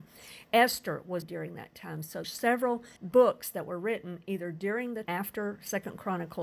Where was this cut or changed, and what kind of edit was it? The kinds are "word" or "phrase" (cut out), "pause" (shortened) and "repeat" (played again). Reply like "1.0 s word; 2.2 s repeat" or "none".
1.2 s word; 2.2 s word; 3.0 s pause; 5.0 s phrase